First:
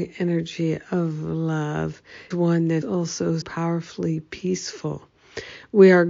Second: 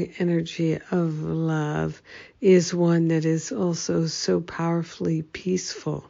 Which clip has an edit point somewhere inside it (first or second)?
first